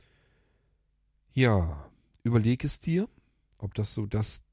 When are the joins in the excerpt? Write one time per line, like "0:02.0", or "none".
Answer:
none

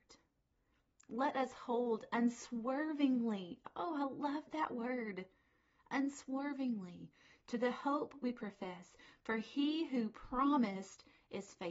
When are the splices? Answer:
none

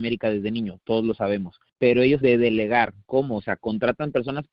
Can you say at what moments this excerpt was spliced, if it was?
0:01.7
0:02.2

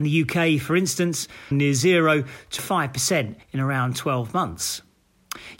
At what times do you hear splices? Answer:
0:01.5
0:02.6
0:03.4

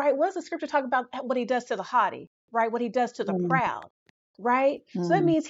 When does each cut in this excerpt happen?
none

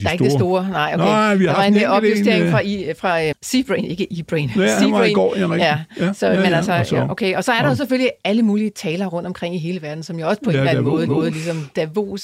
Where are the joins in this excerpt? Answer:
0:03.3
0:11.1

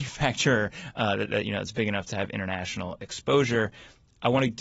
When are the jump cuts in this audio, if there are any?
none

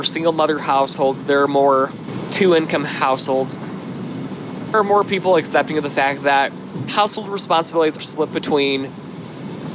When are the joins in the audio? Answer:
0:04.7
0:08.0

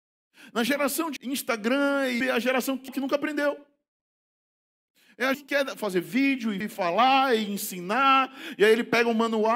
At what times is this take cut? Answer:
0:01.2
0:02.2
0:02.9
0:05.3
0:06.6

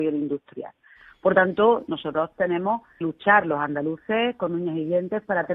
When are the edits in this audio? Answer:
0:03.0

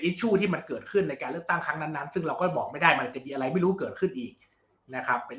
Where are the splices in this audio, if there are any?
none

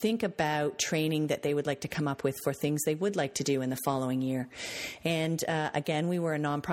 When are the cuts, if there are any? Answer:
none

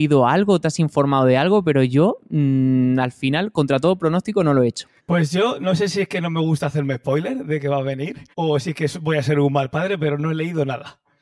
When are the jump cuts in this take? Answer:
0:05.0
0:08.3

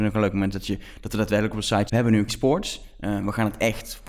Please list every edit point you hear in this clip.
0:01.9
0:02.3

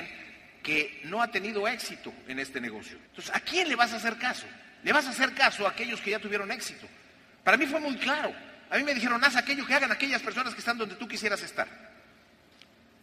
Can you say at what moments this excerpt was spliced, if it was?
0:03.1

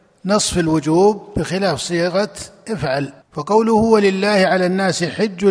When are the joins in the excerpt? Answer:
0:03.2

